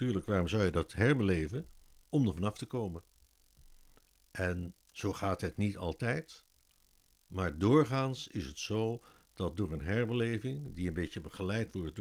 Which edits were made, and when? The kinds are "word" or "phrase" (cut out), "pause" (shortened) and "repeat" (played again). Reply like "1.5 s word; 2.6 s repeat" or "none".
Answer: 4.8 s pause

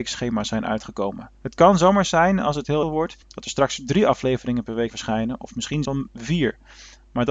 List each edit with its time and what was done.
1.3 s pause; 2.8 s phrase; 3.2 s pause; 4.9 s word; 5.8 s word

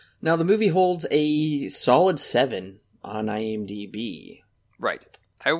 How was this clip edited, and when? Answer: none

